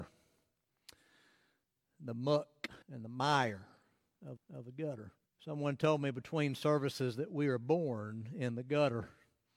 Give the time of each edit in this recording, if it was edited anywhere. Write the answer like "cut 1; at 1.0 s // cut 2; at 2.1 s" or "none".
cut 1; at 2.8 s // cut 2; at 4.4 s // cut 3; at 5.3 s